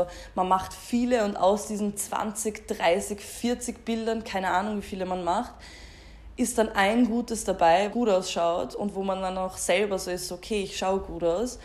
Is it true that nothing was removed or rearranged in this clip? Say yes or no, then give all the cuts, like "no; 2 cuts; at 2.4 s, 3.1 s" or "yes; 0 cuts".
no; 1 cut; at 7.9 s